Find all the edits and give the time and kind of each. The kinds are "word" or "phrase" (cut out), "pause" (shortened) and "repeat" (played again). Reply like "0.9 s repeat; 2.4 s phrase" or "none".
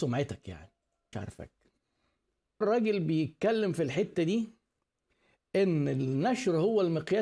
1.1 s phrase; 2.6 s word